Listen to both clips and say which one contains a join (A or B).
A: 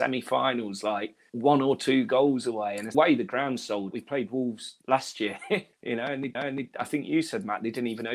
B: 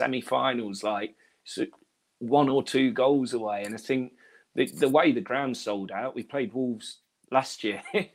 A